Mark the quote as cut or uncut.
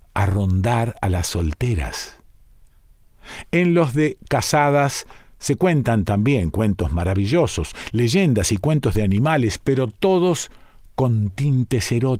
uncut